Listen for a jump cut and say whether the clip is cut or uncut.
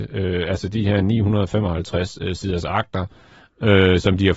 uncut